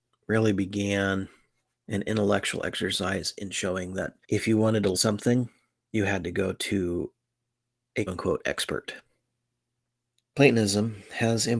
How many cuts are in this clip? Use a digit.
3